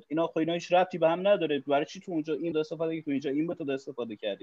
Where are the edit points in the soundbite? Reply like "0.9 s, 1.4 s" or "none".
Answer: 2.5 s